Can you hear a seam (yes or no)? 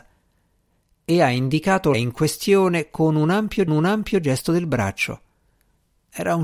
yes